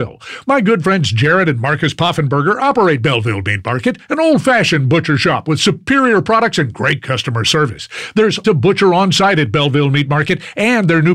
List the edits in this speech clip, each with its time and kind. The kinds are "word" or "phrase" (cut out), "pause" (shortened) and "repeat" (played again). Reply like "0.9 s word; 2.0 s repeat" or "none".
8.4 s word